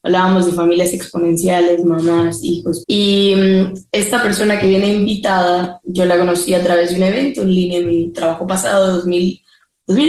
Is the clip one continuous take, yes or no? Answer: no